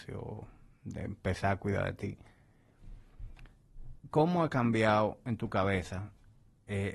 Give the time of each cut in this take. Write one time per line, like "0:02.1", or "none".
0:04.0